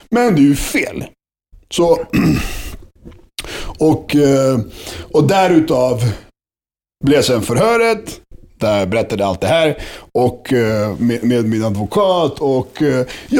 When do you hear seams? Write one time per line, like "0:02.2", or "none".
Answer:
none